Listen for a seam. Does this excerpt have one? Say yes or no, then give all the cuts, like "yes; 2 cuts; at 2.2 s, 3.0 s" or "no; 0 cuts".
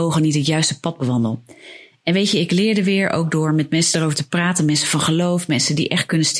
no; 0 cuts